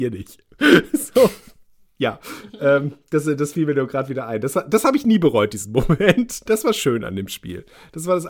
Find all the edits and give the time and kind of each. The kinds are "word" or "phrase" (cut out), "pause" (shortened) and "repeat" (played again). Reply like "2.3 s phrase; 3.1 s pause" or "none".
none